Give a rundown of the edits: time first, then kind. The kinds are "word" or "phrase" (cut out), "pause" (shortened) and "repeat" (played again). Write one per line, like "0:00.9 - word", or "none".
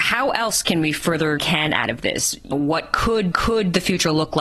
0:01.4 - phrase
0:02.5 - word
0:03.3 - repeat